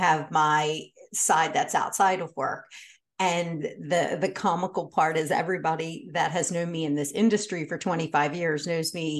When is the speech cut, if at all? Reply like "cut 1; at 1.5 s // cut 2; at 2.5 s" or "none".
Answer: none